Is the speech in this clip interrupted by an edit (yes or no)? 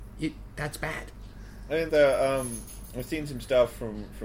yes